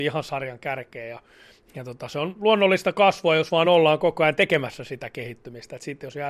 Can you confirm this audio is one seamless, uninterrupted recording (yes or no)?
yes